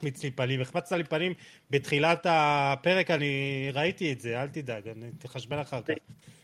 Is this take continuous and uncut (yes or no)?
yes